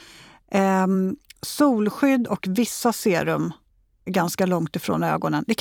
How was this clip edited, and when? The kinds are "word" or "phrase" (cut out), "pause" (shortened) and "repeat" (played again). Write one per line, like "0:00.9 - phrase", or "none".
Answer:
0:04.1 - word